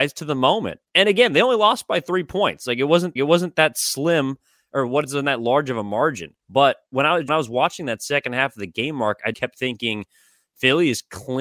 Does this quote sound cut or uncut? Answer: cut